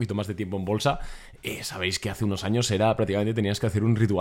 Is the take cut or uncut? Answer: uncut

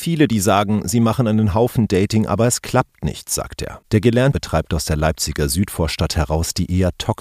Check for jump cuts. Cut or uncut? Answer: cut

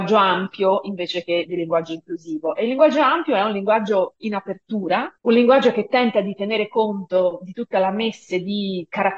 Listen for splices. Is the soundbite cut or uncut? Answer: uncut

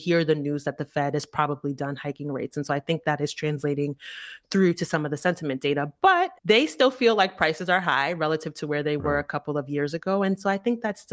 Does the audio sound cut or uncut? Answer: cut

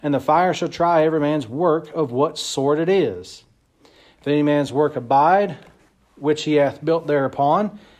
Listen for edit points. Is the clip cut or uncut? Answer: uncut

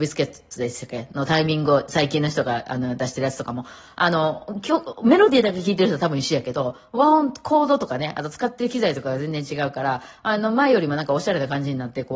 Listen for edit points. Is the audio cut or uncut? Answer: uncut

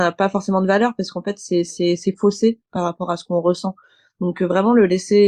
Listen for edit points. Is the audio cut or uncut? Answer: uncut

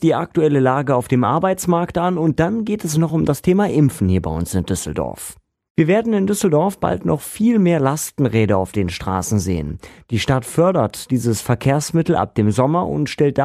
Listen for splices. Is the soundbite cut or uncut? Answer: uncut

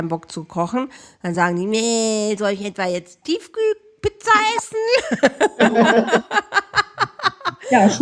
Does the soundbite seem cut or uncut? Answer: uncut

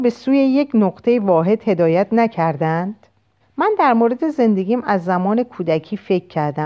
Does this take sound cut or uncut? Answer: cut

